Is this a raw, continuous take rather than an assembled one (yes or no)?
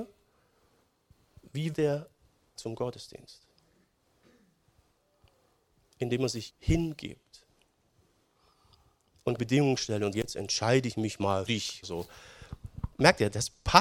no